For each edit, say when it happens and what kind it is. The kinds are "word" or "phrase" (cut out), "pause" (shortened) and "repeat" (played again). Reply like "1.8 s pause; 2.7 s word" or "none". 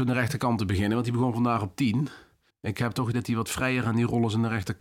2.5 s pause; 3.1 s word